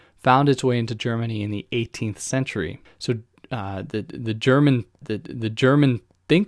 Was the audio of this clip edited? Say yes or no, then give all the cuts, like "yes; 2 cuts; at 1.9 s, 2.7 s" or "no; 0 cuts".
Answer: yes; 2 cuts; at 2.8 s, 5.0 s